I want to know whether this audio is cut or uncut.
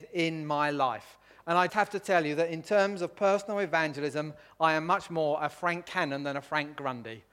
cut